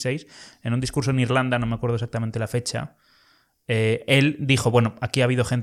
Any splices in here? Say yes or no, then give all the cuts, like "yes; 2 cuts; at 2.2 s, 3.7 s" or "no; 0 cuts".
no; 0 cuts